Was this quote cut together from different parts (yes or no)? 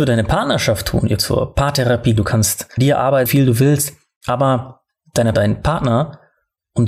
yes